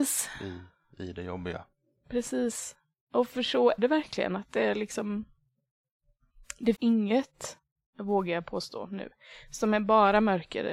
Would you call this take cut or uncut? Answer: cut